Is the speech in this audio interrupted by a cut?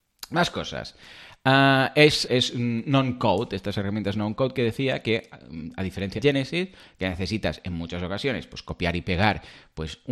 yes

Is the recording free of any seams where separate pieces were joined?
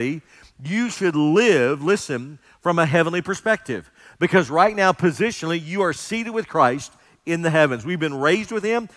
yes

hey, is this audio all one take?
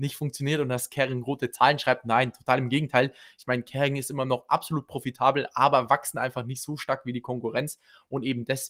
yes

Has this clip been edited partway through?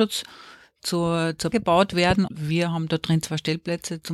yes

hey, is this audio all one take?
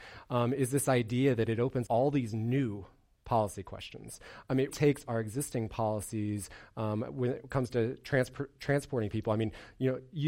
no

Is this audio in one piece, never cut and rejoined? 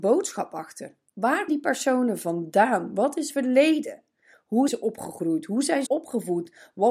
no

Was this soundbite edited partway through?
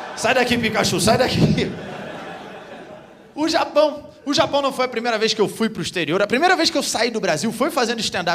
no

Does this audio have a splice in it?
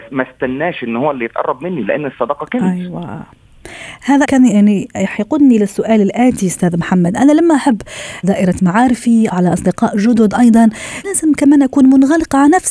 yes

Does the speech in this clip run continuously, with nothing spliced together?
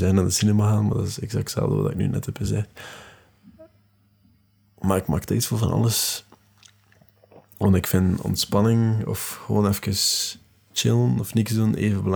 yes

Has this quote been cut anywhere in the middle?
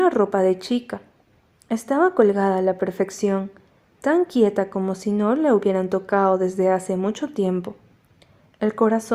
no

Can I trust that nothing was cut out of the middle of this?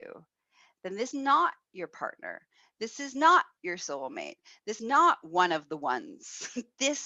no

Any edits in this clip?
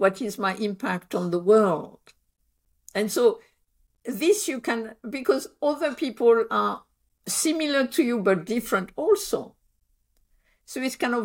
no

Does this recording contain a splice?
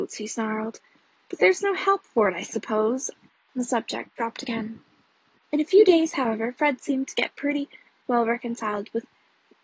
no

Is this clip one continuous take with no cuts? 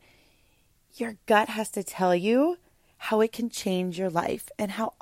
yes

